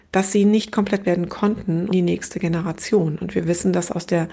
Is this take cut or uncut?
cut